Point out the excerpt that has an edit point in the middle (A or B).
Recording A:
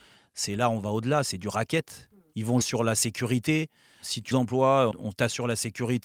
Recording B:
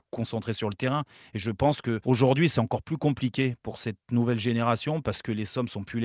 A